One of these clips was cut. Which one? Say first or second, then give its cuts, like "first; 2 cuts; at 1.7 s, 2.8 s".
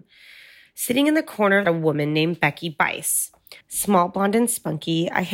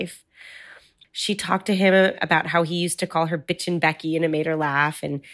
first; 2 cuts; at 1.6 s, 3.6 s